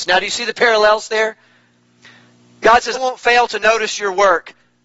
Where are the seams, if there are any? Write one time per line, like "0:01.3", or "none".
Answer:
0:02.9

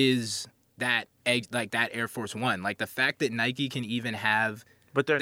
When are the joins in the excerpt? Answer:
0:01.2

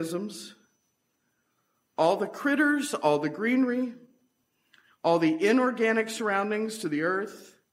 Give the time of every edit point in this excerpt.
none

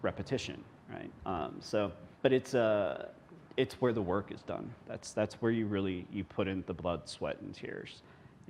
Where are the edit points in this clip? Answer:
0:02.1
0:03.4
0:04.8

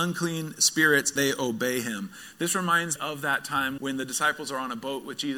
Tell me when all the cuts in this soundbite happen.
0:01.2
0:03.0
0:03.8

